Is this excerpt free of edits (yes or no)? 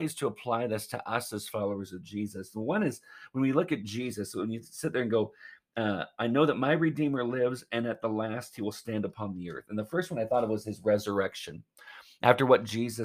yes